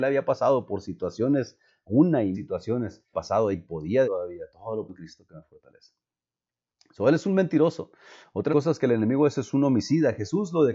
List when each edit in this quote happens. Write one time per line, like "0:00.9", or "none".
0:02.3
0:03.1
0:03.5
0:04.0
0:04.9
0:08.5